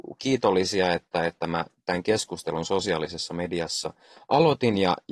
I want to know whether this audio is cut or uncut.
uncut